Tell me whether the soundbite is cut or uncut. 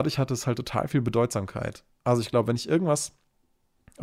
uncut